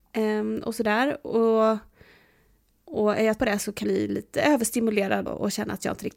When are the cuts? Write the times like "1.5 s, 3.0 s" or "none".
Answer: 3.4 s, 3.8 s, 5.3 s